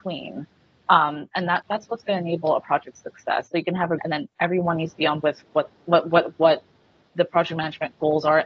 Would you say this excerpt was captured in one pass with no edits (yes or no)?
no